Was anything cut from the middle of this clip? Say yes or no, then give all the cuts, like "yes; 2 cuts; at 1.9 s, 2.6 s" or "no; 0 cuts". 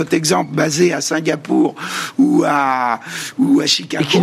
no; 0 cuts